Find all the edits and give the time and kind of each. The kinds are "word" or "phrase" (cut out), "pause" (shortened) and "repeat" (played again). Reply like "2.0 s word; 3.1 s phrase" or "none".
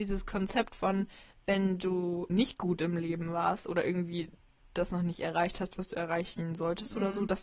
2.3 s word